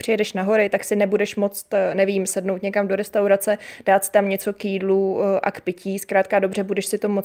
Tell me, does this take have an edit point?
no; 0 cuts

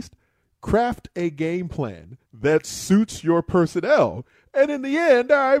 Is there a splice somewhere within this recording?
yes; 2 cuts; at 2.2 s, 4.7 s

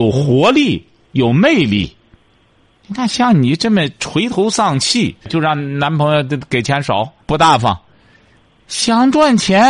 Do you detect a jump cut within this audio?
yes; 2 cuts; at 5.2 s, 7.2 s

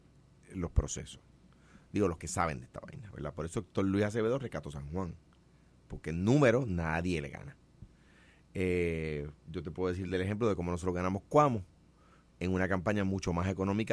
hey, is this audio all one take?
yes; 0 cuts

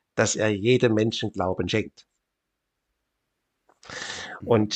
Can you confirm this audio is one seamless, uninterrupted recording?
yes; 0 cuts

